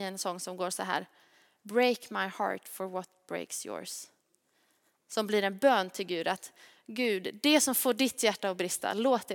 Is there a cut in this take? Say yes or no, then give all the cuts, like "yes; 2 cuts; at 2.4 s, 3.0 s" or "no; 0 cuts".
no; 0 cuts